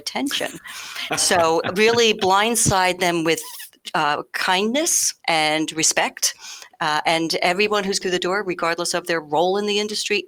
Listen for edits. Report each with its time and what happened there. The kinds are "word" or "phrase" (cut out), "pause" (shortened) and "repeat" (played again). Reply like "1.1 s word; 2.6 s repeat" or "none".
5.2 s pause; 8.0 s word

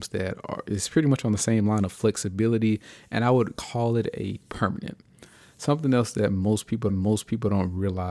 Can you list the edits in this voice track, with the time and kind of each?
4.4 s word; 6.9 s repeat

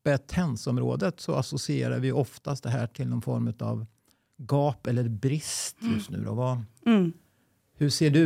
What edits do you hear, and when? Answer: none

